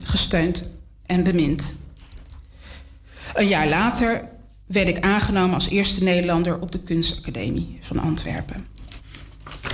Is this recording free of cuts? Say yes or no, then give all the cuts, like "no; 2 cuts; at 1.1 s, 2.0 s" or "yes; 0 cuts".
yes; 0 cuts